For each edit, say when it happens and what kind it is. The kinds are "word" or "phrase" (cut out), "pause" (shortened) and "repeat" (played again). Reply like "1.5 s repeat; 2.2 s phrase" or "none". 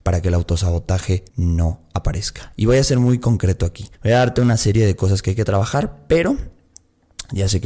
1.3 s pause; 3.9 s pause